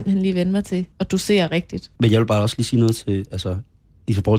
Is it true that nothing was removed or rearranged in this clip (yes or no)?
no